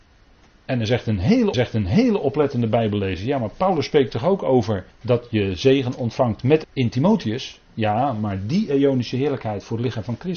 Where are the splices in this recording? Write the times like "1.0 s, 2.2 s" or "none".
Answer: 1.5 s, 4.9 s, 6.6 s